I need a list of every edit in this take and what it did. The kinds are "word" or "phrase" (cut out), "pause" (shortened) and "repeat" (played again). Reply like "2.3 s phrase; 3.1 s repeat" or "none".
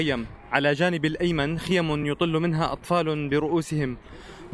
none